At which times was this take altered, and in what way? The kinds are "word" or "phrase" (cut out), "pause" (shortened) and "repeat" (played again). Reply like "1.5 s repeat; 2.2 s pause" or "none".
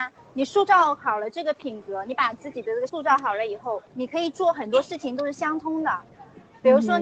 2.9 s word; 3.9 s pause